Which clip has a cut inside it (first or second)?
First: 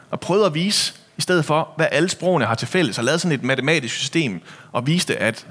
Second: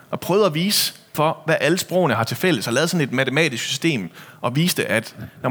second